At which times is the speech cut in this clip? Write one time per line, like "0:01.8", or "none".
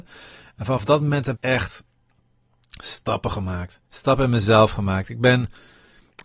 0:01.4
0:03.8